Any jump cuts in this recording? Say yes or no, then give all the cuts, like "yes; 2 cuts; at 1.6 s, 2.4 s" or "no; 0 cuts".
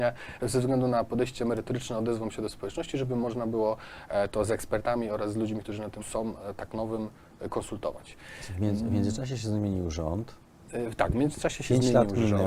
yes; 1 cut; at 6.0 s